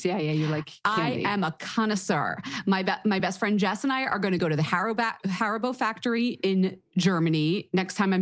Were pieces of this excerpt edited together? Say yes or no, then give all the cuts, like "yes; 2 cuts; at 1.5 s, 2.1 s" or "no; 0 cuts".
no; 0 cuts